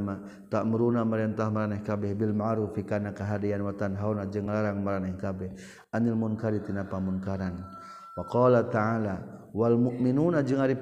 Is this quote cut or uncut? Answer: uncut